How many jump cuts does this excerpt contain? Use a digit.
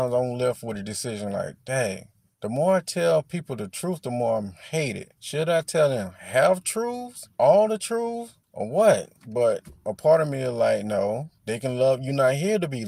6